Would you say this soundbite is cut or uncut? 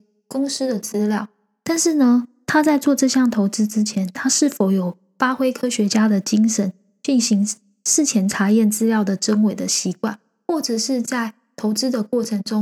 uncut